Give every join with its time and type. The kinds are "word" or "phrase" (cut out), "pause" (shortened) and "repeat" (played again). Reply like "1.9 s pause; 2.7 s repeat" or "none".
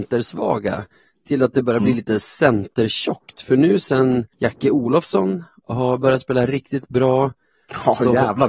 4.3 s pause